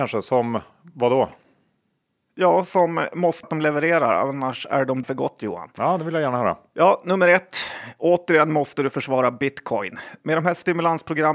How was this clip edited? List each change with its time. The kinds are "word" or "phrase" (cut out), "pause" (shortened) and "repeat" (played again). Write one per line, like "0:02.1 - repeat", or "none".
0:03.4 - word
0:05.0 - word